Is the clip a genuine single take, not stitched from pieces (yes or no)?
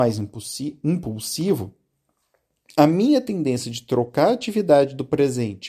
yes